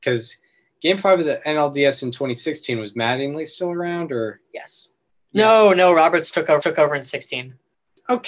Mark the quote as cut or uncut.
cut